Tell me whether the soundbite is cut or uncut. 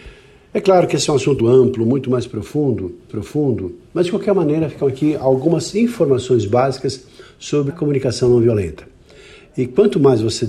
cut